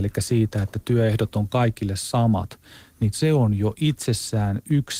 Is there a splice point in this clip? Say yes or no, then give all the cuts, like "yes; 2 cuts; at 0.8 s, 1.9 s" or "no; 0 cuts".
yes; 1 cut; at 3.1 s